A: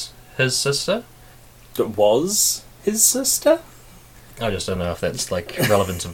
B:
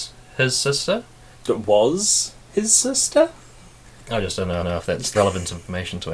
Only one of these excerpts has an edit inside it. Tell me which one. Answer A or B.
B